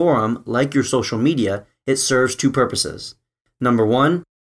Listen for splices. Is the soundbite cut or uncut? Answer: uncut